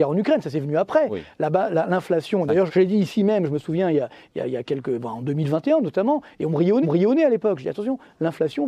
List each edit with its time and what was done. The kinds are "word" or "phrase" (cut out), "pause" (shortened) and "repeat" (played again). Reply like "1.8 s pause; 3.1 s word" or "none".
2.7 s word; 6.8 s repeat

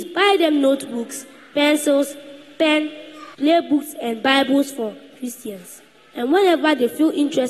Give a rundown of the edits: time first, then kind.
3.3 s pause

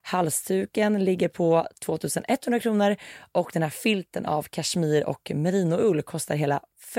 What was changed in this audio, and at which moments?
none

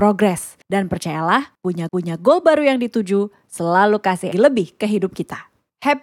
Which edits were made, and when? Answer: 1.9 s repeat; 4.3 s word

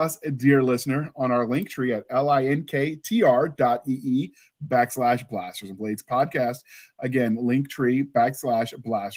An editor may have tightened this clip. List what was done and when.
none

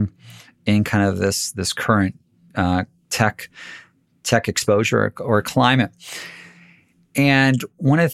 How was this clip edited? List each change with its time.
none

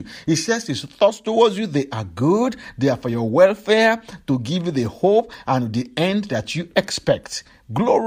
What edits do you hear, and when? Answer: none

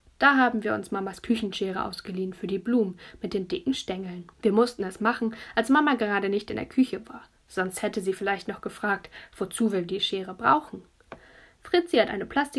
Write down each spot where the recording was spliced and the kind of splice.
4.3 s pause

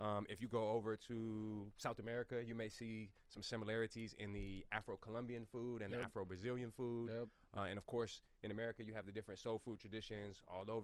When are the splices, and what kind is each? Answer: none

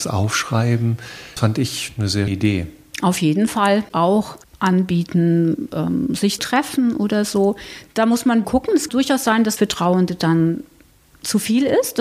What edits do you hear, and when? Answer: 1.4 s word; 2.3 s word; 6.4 s word; 8.4 s word; 8.9 s word; 9.6 s word

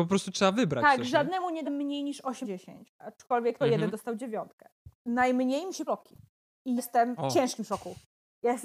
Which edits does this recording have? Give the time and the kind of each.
1.6 s word; 2.4 s word; 3.6 s word; 5.9 s word; 6.8 s word; 7.2 s word

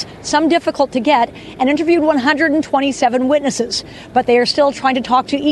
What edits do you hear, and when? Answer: none

